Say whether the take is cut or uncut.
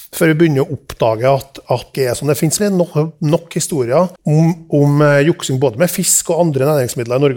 cut